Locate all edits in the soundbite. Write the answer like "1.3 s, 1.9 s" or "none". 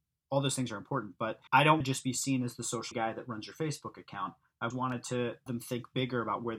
1.5 s, 1.8 s, 2.9 s, 4.7 s, 5.5 s